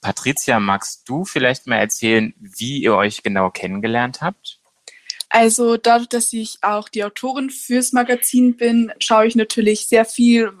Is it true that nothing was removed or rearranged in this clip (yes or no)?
no